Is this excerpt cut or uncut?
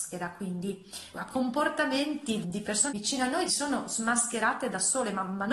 cut